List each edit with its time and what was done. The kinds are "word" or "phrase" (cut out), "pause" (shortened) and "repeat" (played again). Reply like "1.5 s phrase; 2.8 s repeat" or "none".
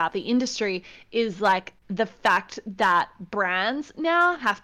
1.8 s pause